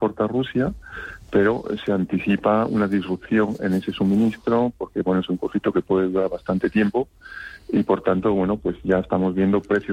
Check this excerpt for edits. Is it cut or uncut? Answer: uncut